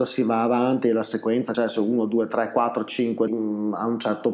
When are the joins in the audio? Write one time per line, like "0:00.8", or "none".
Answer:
0:01.5
0:03.3